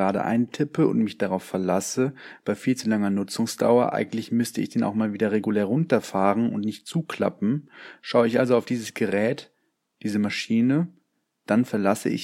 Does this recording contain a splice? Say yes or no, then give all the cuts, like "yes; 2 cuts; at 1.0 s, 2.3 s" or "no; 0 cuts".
no; 0 cuts